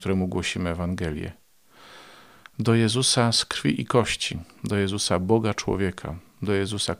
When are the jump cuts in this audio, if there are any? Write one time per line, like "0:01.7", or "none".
none